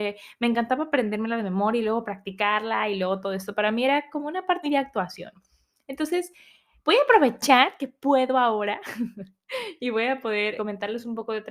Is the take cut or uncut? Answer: cut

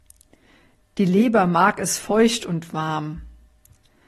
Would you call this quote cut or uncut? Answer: uncut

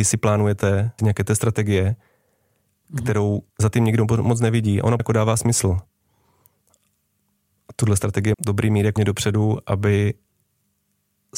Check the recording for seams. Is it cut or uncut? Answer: cut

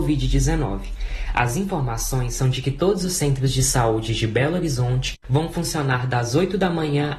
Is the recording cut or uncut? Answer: uncut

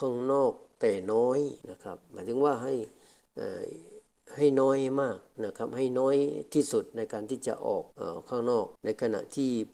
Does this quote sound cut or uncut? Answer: cut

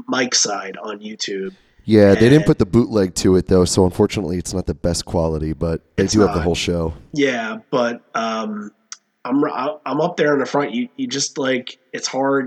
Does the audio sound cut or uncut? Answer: uncut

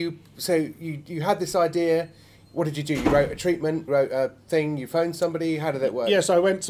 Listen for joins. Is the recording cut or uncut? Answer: cut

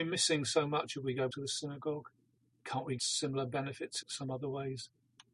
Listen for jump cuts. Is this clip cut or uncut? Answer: cut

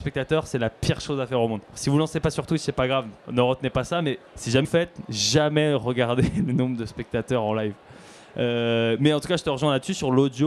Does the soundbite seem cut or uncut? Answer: cut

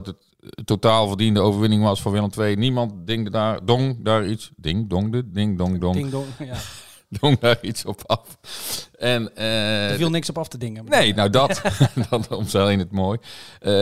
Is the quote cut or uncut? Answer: uncut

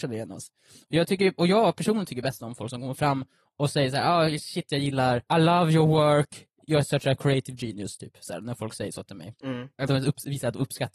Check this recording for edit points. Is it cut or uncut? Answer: cut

